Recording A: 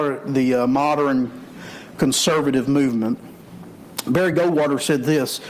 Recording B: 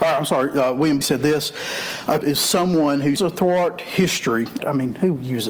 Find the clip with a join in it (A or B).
B